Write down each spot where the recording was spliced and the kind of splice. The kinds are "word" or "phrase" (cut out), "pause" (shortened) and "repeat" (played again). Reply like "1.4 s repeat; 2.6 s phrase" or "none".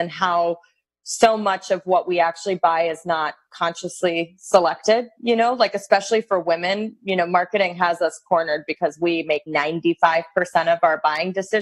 9.5 s word